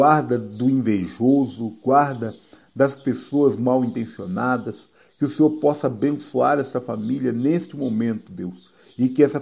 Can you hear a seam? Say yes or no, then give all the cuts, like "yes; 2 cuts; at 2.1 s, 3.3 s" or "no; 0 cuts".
no; 0 cuts